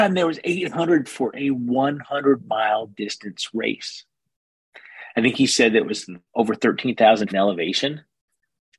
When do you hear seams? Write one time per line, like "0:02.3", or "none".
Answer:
0:01.1
0:06.3
0:07.3